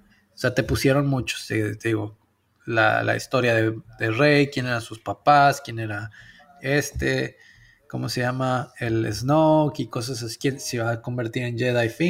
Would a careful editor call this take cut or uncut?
uncut